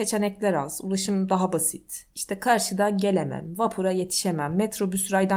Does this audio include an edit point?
no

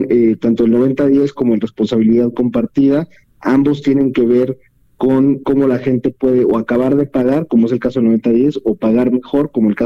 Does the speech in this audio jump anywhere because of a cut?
no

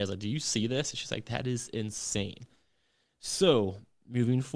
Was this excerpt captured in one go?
yes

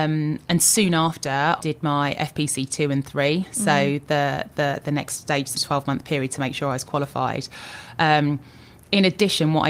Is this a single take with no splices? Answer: no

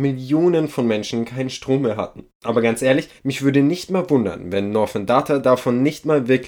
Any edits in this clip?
yes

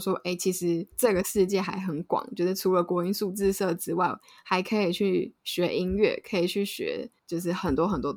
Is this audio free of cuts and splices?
yes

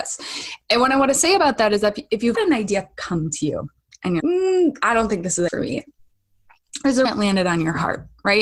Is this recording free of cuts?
no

